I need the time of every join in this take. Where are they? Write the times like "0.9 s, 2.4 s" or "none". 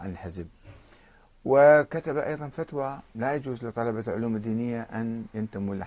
3.1 s